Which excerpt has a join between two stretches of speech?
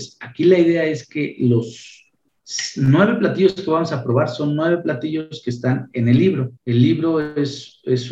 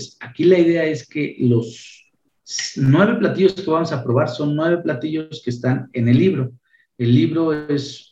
first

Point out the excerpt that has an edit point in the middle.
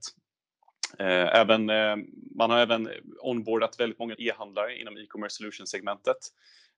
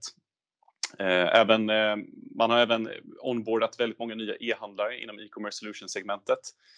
first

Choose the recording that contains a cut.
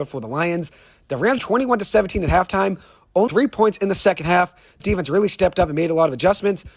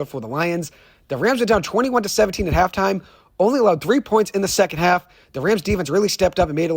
first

